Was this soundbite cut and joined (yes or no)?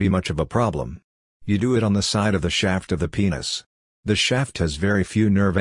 no